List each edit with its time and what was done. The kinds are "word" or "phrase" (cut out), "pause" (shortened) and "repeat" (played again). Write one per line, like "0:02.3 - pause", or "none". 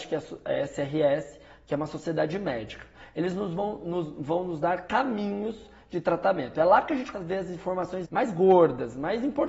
0:07.1 - word
0:08.0 - word